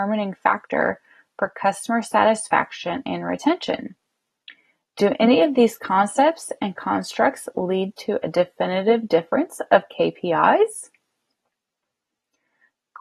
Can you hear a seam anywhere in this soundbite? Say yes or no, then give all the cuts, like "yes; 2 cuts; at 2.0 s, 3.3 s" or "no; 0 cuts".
no; 0 cuts